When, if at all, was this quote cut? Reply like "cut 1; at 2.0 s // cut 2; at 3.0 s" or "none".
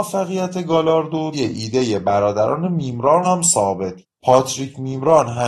cut 1; at 1.3 s // cut 2; at 3.2 s // cut 3; at 4.0 s